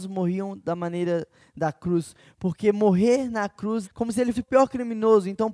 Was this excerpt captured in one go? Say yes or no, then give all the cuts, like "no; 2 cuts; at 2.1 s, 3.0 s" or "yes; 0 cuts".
no; 2 cuts; at 3.8 s, 4.3 s